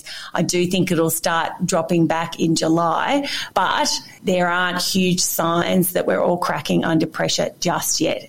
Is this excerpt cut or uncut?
uncut